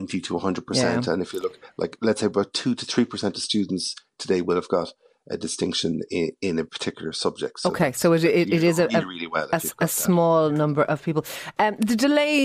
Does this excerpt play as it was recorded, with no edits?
yes; 0 cuts

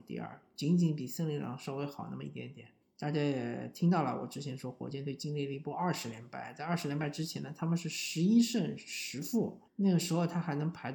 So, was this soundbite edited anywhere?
yes; 2 cuts; at 2.8 s, 9.7 s

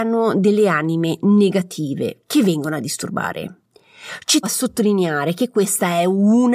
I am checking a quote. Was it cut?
yes; 1 cut; at 4.4 s

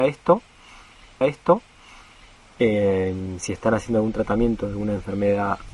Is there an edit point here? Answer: yes; 1 cut; at 1.2 s

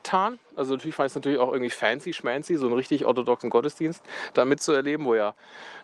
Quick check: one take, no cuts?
yes; 0 cuts

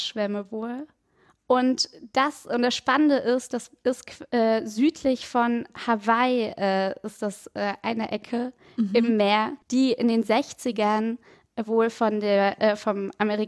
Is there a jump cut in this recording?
yes; 1 cut; at 9.6 s

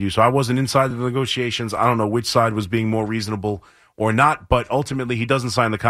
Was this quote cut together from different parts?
no; 0 cuts

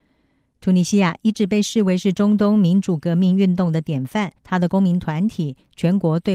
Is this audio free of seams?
no; 1 cut; at 4.4 s

